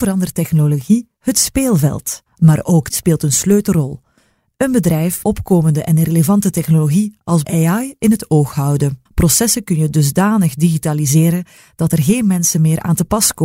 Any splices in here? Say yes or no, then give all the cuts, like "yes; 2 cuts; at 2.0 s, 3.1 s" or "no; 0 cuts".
yes; 5 cuts; at 2.3 s, 2.9 s, 5.2 s, 7.4 s, 9.1 s